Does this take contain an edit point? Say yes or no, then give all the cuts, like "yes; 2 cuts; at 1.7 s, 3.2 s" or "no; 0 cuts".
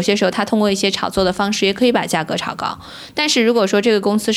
no; 0 cuts